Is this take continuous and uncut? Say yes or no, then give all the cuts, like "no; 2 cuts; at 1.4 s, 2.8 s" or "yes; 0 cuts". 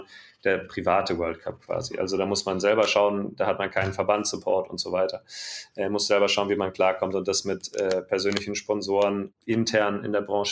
yes; 0 cuts